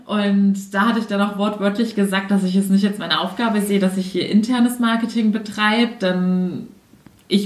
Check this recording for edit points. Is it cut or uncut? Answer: uncut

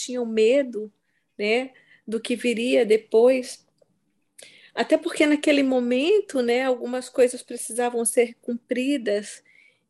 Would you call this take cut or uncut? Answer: uncut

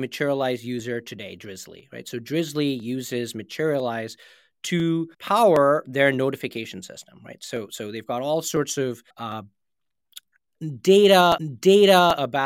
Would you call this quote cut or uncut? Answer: cut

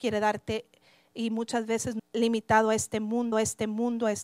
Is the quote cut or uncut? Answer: cut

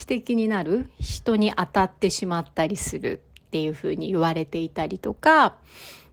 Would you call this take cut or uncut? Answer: uncut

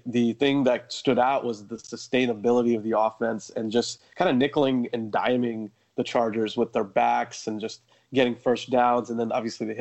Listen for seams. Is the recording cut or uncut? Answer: uncut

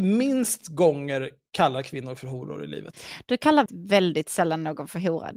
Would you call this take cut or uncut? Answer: cut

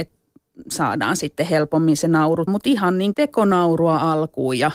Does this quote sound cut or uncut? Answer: cut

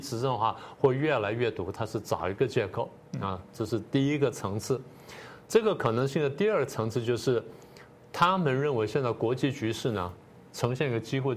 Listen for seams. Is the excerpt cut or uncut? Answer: uncut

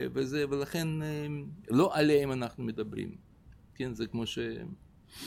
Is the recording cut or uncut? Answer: uncut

